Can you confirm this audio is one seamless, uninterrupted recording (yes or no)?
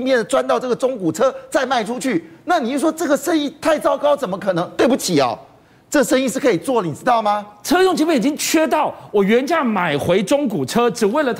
yes